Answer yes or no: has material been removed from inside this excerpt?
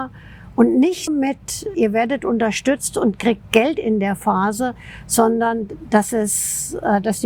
yes